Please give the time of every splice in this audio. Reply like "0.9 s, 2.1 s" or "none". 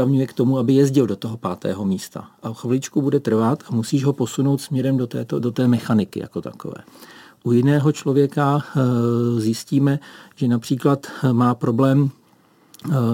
none